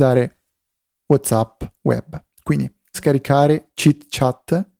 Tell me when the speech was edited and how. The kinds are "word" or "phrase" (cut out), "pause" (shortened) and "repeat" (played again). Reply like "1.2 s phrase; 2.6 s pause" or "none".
2.9 s phrase